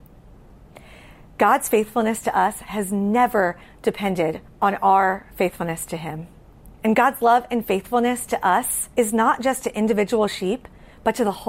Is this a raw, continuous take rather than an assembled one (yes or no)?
no